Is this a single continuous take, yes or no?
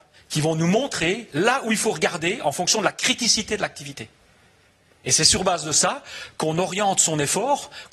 yes